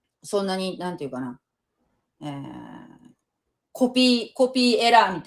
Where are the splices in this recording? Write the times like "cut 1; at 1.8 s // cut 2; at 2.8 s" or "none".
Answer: none